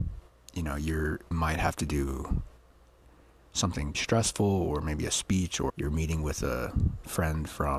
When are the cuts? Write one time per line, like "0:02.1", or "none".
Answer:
0:01.3
0:03.9
0:05.7

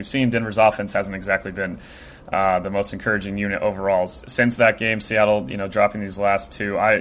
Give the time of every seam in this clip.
none

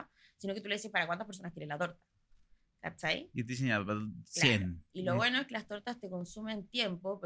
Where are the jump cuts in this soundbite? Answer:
none

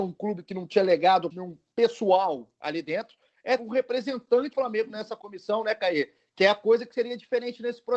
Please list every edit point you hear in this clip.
0:01.3
0:03.6
0:04.5

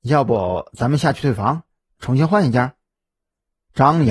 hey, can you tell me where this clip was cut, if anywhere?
0:02.0

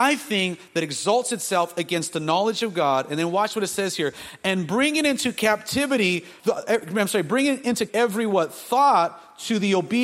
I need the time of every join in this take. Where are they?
0:06.4
0:07.9

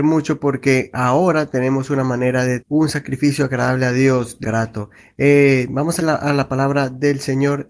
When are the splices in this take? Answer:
0:02.6
0:04.4
0:06.0

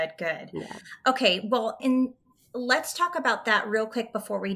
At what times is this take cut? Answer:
0:01.8

